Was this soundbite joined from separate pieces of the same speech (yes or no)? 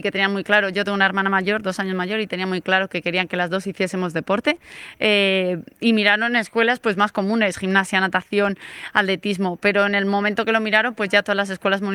no